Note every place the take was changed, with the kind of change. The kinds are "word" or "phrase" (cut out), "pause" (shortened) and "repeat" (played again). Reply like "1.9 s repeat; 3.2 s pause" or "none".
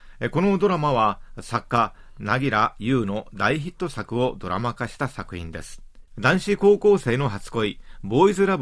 6.1 s pause